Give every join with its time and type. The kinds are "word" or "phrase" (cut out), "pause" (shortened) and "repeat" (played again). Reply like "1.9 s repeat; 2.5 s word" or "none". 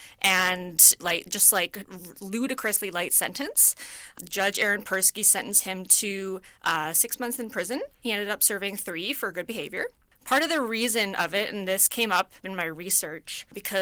1.0 s phrase